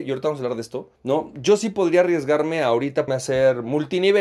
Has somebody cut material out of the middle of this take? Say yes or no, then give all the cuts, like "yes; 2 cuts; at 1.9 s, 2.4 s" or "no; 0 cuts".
yes; 2 cuts; at 0.9 s, 3.1 s